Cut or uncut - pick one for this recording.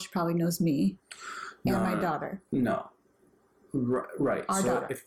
uncut